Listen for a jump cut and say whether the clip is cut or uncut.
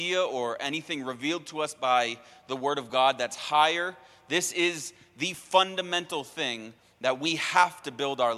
uncut